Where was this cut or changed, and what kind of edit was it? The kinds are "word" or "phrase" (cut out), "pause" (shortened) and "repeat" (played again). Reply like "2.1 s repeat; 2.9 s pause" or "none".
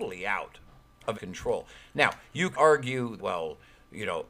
1.1 s word; 2.5 s word; 3.2 s word